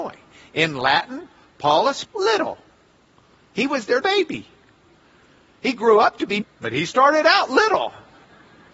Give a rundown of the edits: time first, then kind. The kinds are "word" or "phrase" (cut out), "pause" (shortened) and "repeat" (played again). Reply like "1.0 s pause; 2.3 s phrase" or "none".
2.0 s word; 4.0 s word; 6.4 s word